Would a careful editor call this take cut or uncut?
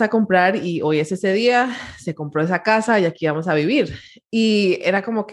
uncut